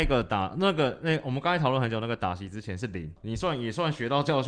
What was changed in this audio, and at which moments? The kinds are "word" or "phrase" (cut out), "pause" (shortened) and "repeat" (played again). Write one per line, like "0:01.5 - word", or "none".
0:03.2 - word